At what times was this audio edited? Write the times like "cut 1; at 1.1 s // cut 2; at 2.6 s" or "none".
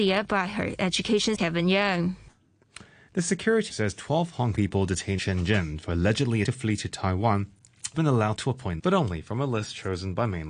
cut 1; at 1.3 s // cut 2; at 3.7 s // cut 3; at 4.5 s // cut 4; at 5.2 s // cut 5; at 6.4 s // cut 6; at 7.9 s // cut 7; at 8.8 s